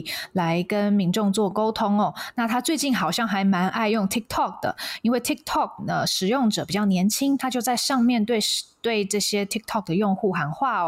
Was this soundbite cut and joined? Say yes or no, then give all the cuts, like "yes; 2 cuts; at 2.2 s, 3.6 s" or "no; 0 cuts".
no; 0 cuts